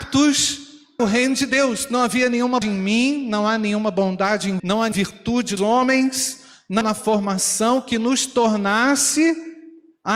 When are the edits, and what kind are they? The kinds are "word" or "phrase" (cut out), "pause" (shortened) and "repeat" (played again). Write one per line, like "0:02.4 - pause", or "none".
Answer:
0:01.0 - word
0:02.6 - word
0:04.6 - word
0:04.9 - word
0:05.6 - word
0:06.8 - word